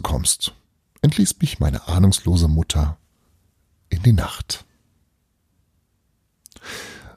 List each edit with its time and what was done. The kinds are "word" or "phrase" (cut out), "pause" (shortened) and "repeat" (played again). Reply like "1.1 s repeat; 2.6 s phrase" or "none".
none

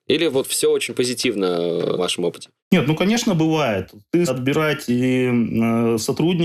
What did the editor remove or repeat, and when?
2.0 s word; 2.6 s pause; 4.3 s word

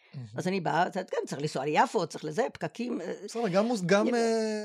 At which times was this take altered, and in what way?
none

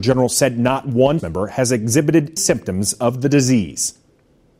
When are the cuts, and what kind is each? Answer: 1.2 s word; 2.4 s word

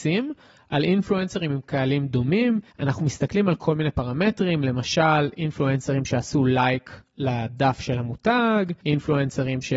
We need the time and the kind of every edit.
none

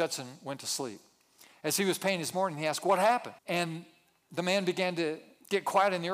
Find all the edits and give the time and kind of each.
2.3 s phrase; 3.4 s pause

